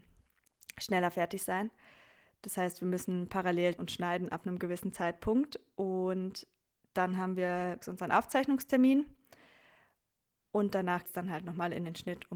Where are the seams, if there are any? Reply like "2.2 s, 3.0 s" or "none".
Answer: 3.8 s, 7.8 s, 11.0 s